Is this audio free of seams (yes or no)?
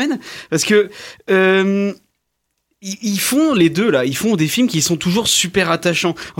yes